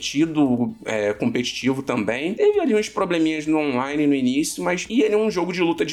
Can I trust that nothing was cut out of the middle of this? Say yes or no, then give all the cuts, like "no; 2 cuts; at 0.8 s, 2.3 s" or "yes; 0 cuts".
yes; 0 cuts